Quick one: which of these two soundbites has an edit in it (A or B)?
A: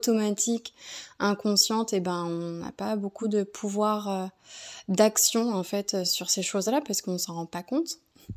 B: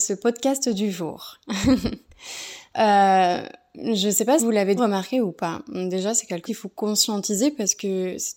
B